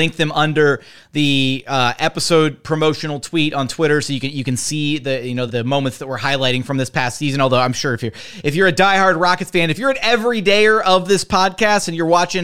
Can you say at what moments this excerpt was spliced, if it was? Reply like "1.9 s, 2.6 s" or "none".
5.5 s